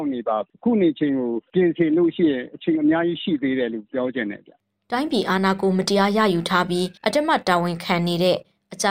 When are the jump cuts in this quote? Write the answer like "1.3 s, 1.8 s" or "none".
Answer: 7.0 s